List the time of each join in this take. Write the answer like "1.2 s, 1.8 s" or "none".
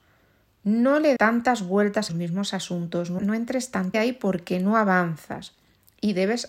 1.2 s, 2.1 s, 3.2 s, 3.9 s